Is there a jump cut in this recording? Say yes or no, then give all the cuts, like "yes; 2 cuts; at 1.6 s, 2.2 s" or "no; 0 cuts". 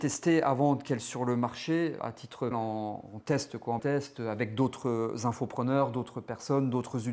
yes; 4 cuts; at 1.0 s, 2.0 s, 2.5 s, 3.8 s